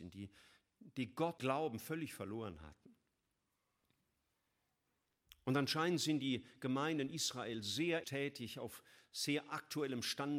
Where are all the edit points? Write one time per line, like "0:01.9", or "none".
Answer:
0:01.4
0:08.0